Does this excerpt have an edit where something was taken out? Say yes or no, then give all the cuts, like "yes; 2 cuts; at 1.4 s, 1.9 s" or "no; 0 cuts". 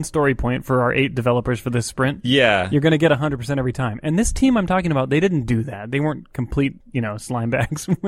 yes; 1 cut; at 6.8 s